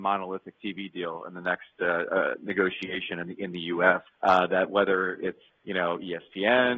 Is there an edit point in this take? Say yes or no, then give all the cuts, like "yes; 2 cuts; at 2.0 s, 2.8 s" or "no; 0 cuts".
yes; 2 cuts; at 4.1 s, 5.5 s